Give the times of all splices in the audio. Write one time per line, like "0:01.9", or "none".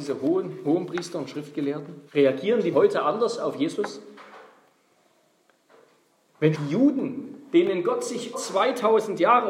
0:02.1
0:02.7
0:06.5
0:08.3